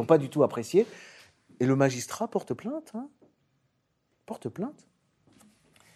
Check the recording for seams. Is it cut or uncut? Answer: uncut